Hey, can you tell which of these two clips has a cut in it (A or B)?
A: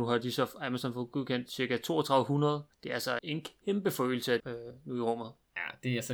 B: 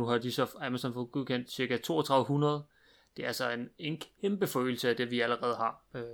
A